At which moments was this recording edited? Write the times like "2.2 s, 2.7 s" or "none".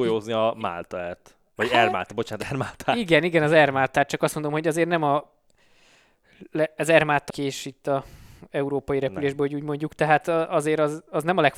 7.3 s